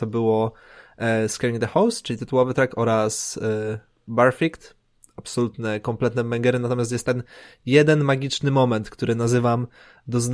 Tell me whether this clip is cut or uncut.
uncut